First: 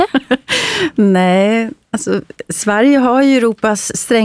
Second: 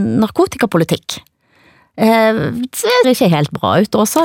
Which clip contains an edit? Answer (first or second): second